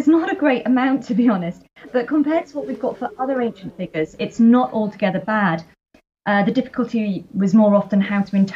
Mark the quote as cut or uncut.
uncut